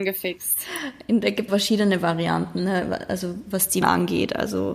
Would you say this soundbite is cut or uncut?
cut